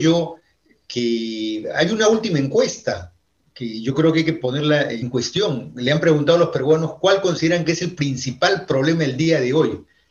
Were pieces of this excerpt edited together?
no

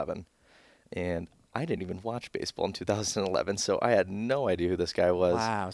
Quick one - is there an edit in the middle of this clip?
no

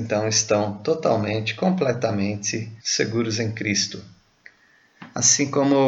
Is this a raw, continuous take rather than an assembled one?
no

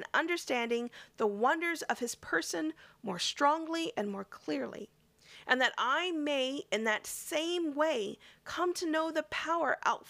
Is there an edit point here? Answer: no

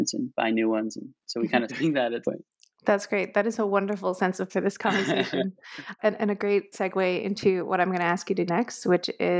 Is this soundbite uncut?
no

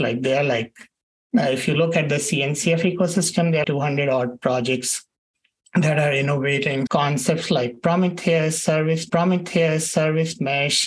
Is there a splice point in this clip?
yes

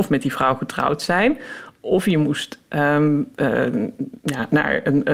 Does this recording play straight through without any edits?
no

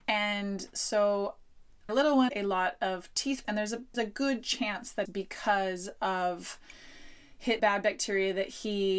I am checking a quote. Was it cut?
yes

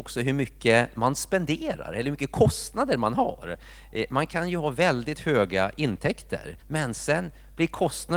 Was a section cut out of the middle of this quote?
yes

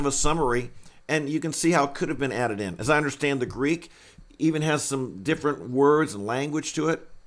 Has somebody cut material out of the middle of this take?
no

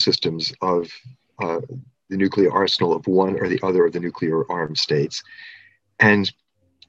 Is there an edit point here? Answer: no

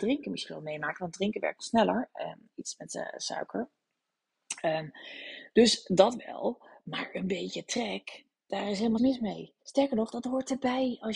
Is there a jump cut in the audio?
yes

